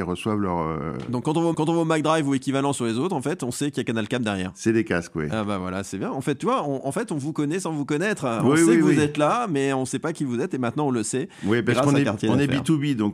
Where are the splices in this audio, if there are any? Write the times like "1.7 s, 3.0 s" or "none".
1.5 s

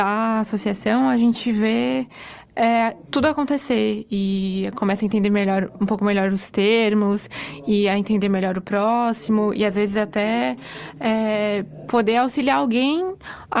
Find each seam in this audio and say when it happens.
none

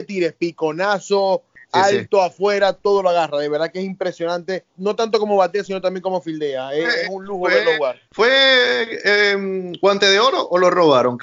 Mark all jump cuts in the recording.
4.7 s, 8.1 s

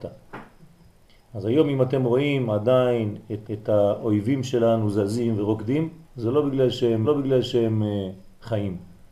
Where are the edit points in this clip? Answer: 3.4 s, 6.0 s, 7.0 s

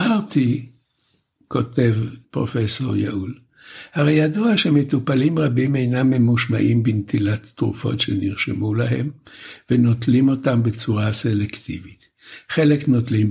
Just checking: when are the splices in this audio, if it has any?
2.2 s

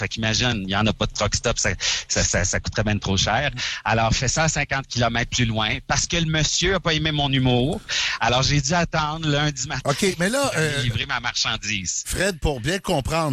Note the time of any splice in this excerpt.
none

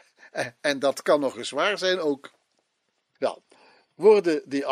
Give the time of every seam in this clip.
none

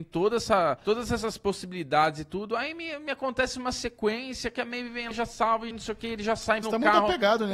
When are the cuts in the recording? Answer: 5.1 s, 5.7 s, 6.6 s

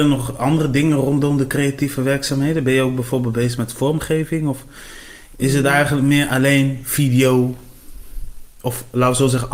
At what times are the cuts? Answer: none

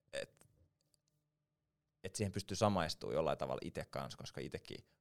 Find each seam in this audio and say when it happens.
none

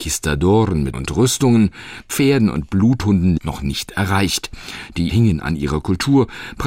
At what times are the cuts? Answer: 0.9 s, 2.0 s, 3.4 s, 5.1 s

